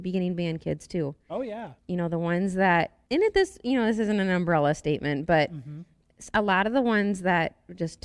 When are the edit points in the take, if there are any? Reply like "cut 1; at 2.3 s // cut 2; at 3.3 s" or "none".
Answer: cut 1; at 1.8 s // cut 2; at 3.0 s